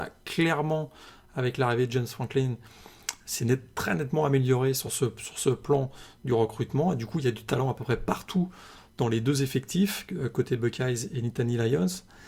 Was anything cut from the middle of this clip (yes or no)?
no